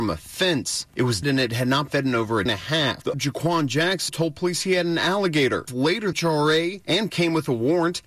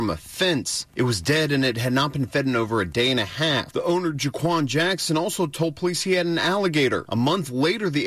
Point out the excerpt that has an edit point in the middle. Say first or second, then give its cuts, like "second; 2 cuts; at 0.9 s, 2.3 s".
first; 8 cuts; at 1.2 s, 1.9 s, 2.5 s, 3.1 s, 4.1 s, 5.7 s, 6.1 s, 7.1 s